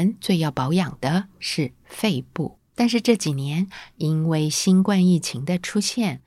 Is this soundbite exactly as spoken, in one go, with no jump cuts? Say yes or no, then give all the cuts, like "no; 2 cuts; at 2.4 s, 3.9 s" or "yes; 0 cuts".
no; 1 cut; at 2.7 s